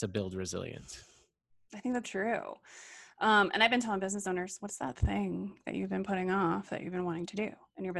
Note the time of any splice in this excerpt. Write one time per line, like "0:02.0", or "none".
0:02.0